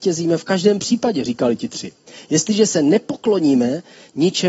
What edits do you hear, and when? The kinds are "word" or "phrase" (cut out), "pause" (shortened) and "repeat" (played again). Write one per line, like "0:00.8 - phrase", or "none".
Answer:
none